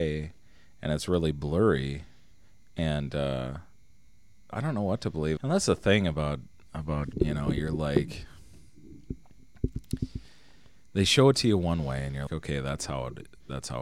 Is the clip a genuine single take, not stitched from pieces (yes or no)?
no